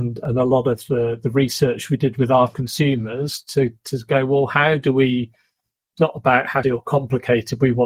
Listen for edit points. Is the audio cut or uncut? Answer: cut